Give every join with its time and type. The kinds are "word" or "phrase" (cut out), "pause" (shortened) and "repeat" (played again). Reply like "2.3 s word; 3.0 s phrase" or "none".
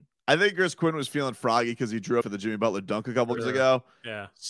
2.2 s phrase; 3.4 s word

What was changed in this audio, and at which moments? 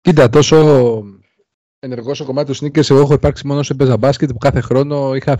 none

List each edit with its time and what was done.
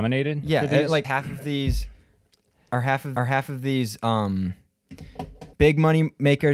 1.0 s word; 3.2 s repeat; 5.5 s pause

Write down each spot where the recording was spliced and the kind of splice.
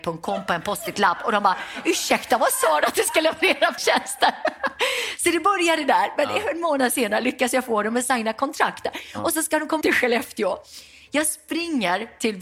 3.8 s word; 9.8 s word

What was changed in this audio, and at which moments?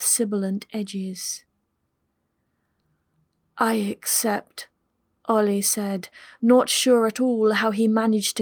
none

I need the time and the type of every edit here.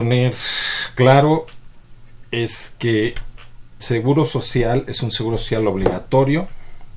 3.8 s word

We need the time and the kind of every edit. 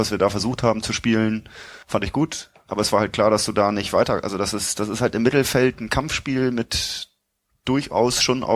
1.8 s pause

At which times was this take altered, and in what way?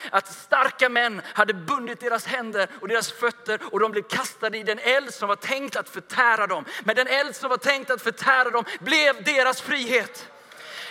none

